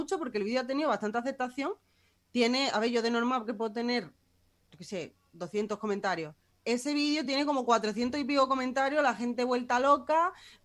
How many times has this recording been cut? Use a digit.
0